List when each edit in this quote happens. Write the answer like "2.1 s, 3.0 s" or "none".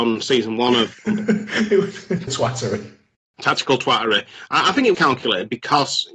2.3 s, 4.9 s